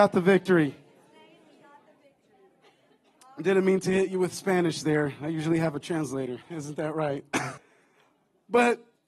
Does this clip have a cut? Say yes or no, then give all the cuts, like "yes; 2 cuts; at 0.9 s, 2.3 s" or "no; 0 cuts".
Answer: yes; 2 cuts; at 6.4 s, 7.6 s